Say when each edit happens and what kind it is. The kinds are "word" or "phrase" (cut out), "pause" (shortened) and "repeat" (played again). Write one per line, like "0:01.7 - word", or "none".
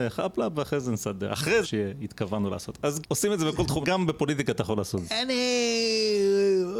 0:01.6 - phrase
0:03.0 - word
0:03.8 - phrase